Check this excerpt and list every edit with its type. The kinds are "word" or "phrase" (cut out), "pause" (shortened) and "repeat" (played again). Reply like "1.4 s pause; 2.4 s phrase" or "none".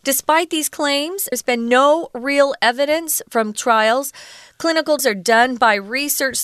1.3 s word; 3.5 s word; 5.0 s word